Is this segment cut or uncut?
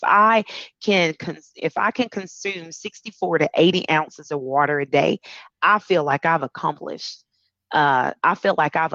uncut